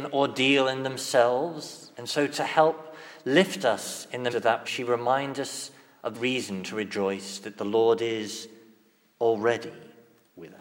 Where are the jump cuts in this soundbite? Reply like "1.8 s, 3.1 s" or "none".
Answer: 1.9 s, 4.3 s, 4.6 s, 6.1 s

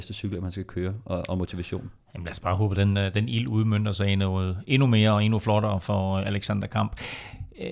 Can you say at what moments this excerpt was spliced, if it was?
none

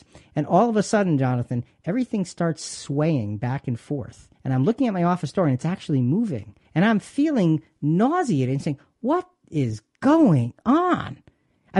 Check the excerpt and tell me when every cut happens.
4.3 s, 6.6 s

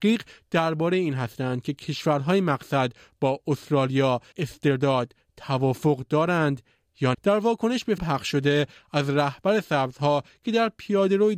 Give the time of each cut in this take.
4.3 s, 7.1 s, 8.0 s

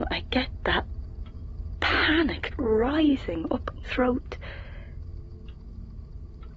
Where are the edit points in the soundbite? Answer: 2.5 s, 3.8 s

